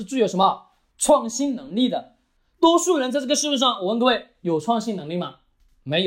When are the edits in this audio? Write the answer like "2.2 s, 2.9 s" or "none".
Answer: none